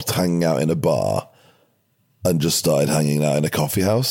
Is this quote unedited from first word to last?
yes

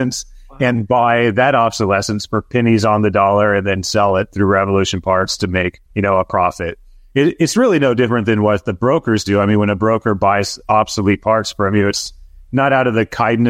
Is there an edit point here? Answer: yes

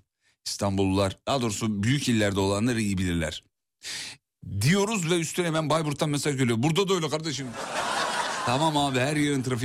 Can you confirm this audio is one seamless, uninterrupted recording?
yes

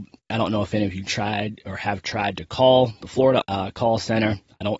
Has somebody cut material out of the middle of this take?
yes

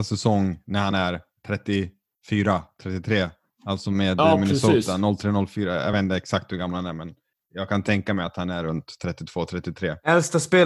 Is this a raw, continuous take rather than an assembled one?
yes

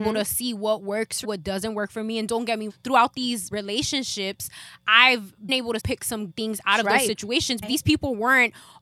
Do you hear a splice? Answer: yes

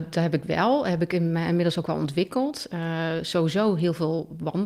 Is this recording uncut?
yes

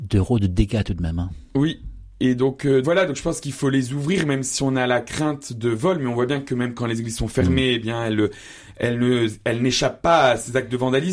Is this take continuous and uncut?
no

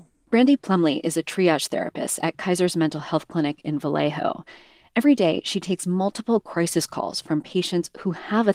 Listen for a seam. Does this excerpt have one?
no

